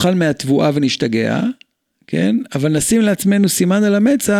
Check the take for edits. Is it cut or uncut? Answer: uncut